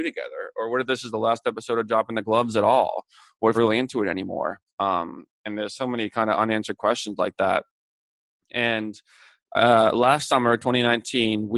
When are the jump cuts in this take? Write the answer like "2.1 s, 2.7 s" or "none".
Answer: 3.5 s, 4.7 s